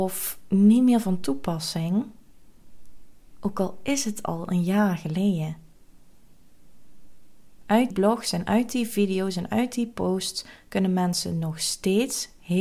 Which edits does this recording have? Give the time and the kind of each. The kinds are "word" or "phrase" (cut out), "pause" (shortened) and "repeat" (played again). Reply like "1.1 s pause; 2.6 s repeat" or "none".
7.9 s word